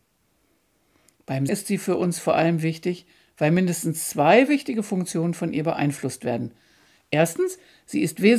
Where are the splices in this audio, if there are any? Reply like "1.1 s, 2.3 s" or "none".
1.5 s